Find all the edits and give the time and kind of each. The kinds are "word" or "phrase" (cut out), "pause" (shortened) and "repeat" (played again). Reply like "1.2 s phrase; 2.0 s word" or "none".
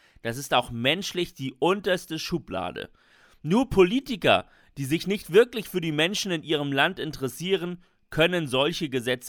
none